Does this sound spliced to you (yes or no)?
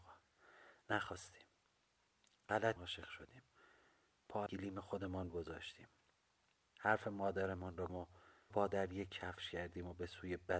yes